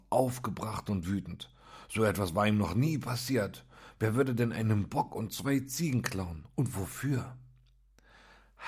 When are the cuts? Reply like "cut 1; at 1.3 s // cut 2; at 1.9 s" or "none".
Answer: none